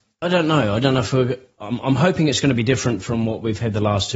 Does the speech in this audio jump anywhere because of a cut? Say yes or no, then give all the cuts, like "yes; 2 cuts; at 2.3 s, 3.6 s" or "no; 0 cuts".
no; 0 cuts